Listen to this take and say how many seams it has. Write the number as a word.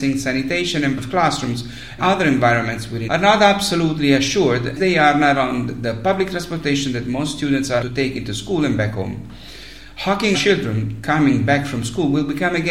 six